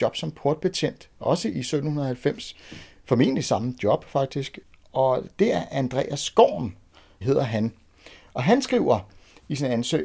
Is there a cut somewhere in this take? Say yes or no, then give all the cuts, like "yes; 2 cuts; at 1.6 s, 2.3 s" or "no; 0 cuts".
no; 0 cuts